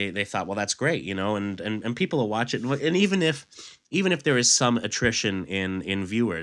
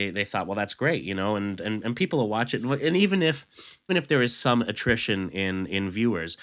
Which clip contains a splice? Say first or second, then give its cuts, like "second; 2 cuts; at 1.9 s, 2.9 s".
second; 1 cut; at 3.9 s